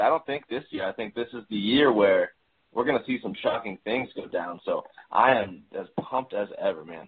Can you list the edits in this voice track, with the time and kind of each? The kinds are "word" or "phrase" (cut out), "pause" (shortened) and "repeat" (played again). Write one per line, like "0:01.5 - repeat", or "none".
none